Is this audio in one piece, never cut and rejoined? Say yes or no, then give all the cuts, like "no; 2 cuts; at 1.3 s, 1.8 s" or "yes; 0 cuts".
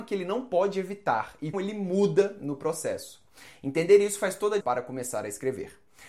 no; 2 cuts; at 1.5 s, 4.6 s